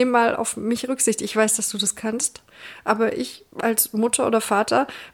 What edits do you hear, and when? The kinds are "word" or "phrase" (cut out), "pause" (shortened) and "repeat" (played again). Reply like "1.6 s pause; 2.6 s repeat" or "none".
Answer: none